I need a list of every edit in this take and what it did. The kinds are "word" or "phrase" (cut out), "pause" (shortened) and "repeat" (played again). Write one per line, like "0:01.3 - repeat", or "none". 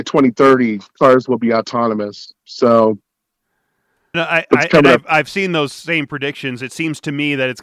0:04.1 - word

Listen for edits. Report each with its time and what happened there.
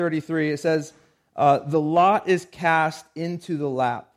none

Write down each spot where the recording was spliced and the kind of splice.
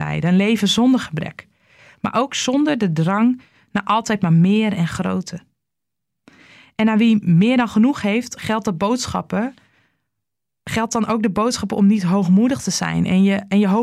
none

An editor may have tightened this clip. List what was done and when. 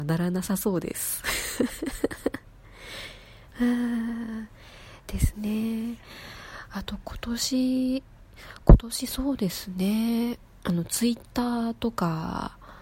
none

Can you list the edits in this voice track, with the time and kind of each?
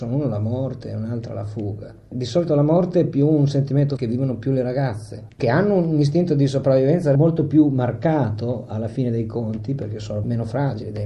0:04.0 - word

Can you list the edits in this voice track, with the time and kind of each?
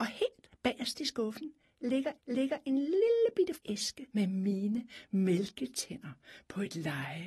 0:02.2 - repeat
0:03.6 - word
0:04.1 - pause

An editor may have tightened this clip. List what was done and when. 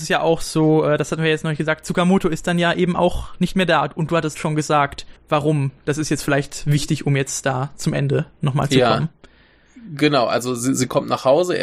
0:05.2 - pause

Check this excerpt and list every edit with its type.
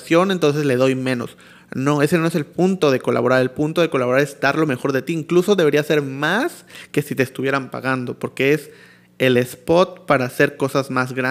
none

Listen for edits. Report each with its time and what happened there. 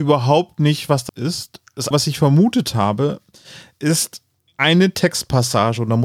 0:01.1 - word
0:01.9 - word
0:04.5 - pause

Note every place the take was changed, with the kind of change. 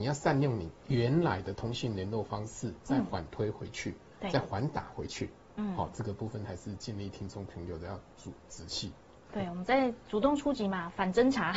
none

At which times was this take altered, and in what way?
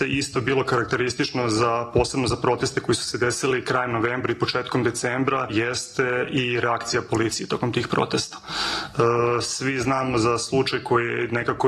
0:05.5 - word

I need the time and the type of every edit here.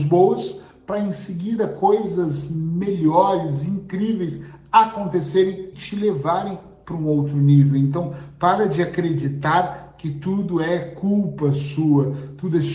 0:05.7 - word

